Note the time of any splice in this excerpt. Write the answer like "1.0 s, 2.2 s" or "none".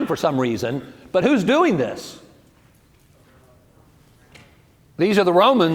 none